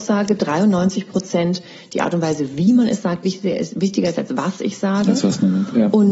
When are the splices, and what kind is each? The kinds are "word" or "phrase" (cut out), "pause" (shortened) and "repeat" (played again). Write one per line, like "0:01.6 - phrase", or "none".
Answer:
none